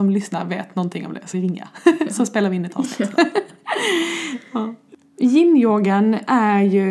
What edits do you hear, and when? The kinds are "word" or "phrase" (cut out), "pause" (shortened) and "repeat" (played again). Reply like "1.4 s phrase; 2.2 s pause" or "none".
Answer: 1.3 s word